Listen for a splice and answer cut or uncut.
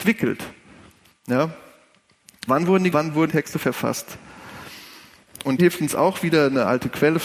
cut